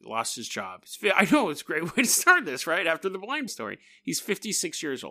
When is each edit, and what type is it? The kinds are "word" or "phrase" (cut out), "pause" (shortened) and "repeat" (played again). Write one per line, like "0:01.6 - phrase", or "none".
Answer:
0:03.5 - word